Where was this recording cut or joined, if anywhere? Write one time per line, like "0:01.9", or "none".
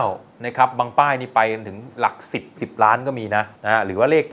0:02.6